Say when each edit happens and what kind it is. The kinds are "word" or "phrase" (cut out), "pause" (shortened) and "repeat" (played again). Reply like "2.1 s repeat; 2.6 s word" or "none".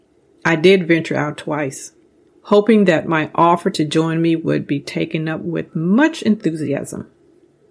none